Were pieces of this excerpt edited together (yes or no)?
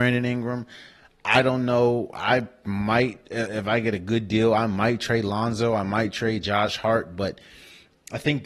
no